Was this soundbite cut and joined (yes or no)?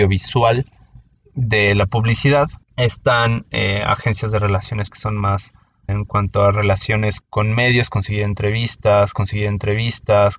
yes